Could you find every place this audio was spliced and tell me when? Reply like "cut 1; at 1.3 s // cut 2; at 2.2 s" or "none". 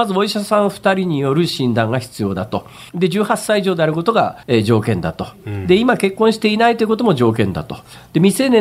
cut 1; at 2.9 s // cut 2; at 4.4 s